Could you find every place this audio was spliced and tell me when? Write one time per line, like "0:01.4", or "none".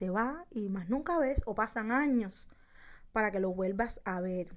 none